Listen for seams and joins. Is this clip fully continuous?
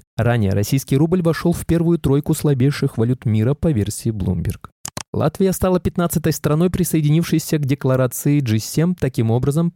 yes; 0 cuts

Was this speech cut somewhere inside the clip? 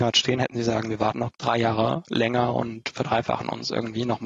yes; 1 cut; at 1.3 s

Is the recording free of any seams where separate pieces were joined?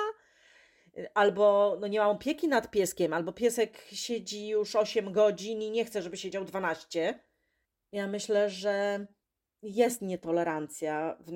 yes; 0 cuts

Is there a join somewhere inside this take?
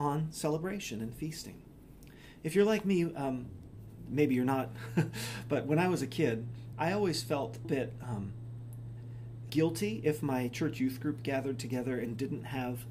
yes; 4 cuts; at 4.1 s, 6.7 s, 7.6 s, 9.5 s

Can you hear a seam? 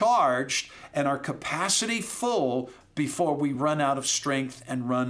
no; 0 cuts

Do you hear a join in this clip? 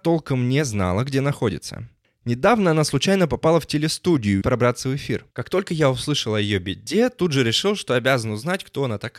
yes; 3 cuts; at 2.0 s, 4.4 s, 5.3 s

